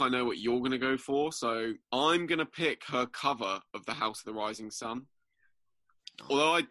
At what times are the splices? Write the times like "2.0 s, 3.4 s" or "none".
1.8 s

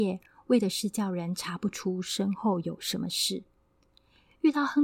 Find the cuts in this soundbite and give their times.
none

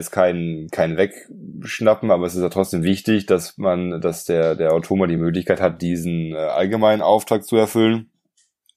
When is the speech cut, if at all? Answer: none

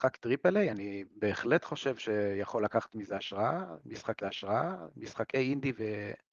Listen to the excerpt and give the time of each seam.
4.2 s

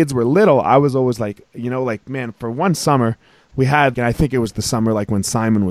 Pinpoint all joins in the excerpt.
3.9 s

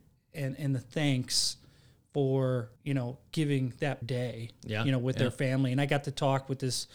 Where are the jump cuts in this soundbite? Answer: 2.8 s, 4.0 s

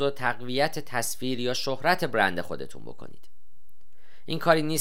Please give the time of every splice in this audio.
none

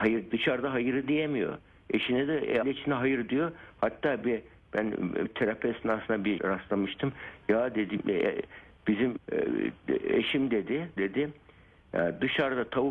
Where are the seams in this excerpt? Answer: 2.6 s, 4.2 s, 5.3 s, 6.4 s, 8.0 s, 9.2 s, 11.0 s

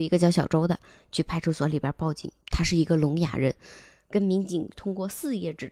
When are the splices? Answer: 2.4 s

